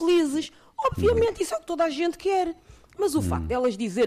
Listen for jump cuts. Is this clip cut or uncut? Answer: uncut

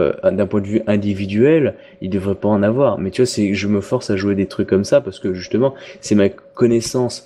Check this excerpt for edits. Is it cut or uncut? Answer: uncut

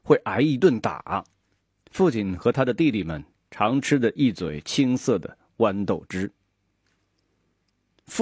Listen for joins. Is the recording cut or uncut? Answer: uncut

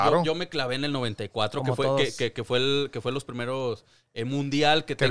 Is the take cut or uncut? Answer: uncut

